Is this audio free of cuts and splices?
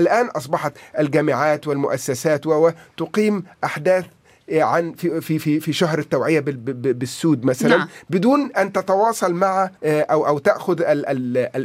no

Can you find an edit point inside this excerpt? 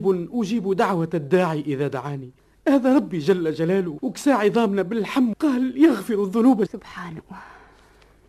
yes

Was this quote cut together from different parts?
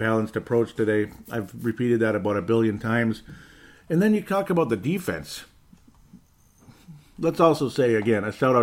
no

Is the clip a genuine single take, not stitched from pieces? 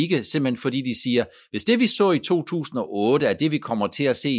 yes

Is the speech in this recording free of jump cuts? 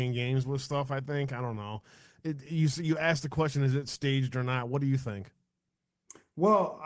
yes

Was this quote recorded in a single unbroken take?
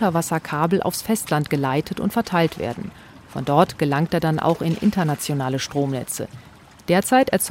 yes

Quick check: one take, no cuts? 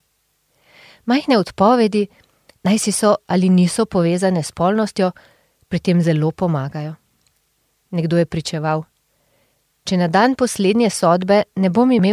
yes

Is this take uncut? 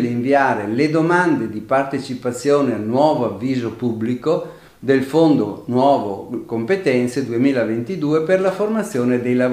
yes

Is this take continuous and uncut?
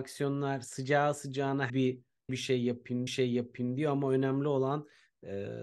no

